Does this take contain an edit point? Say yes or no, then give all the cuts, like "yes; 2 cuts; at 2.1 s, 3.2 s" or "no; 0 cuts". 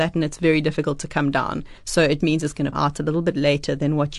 yes; 3 cuts; at 1.8 s, 2.2 s, 2.7 s